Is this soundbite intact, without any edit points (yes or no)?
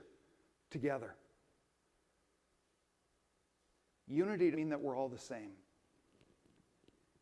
no